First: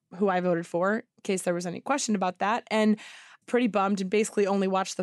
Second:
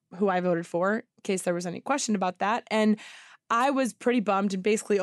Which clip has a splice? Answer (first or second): first